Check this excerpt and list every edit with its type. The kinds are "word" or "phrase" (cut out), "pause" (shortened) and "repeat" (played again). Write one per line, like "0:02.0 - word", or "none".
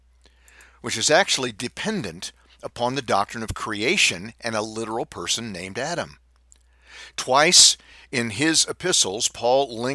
none